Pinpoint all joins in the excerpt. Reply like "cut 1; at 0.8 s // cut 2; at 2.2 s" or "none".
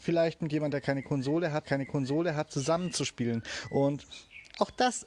cut 1; at 1.6 s

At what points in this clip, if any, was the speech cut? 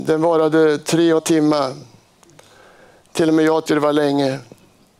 cut 1; at 1.2 s // cut 2; at 3.7 s

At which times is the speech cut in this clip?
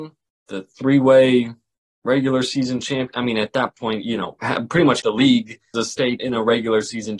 cut 1; at 5.0 s // cut 2; at 5.7 s // cut 3; at 6.2 s

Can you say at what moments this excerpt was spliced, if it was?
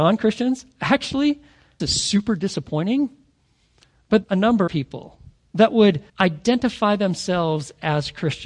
cut 1; at 1.8 s // cut 2; at 4.2 s // cut 3; at 4.7 s // cut 4; at 6.1 s

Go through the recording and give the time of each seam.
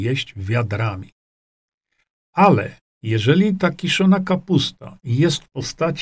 none

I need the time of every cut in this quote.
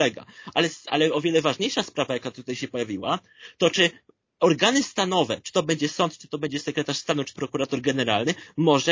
cut 1; at 7.4 s

